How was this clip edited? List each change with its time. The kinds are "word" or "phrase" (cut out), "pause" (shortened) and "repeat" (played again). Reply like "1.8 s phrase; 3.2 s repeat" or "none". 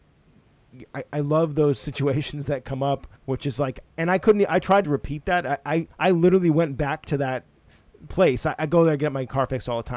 3.2 s pause; 4.8 s word; 5.9 s pause